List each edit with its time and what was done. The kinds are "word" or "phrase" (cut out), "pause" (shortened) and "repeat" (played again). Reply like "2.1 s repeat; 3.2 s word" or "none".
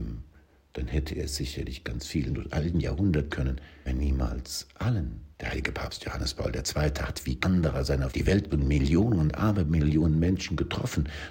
1.8 s word; 2.3 s word; 3.3 s word; 3.9 s word; 5.3 s pause; 7.4 s word; 8.1 s word; 8.5 s word